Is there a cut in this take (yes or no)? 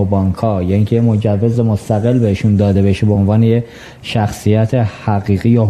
no